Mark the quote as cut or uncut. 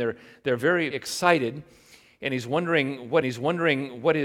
cut